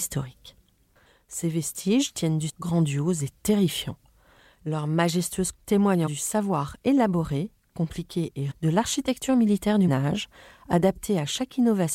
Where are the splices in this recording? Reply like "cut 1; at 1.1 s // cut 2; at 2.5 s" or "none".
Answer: cut 1; at 2.5 s // cut 2; at 5.5 s // cut 3; at 6.1 s // cut 4; at 8.5 s // cut 5; at 9.9 s